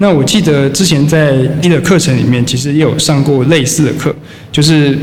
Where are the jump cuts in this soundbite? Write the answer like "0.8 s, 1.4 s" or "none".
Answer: 1.6 s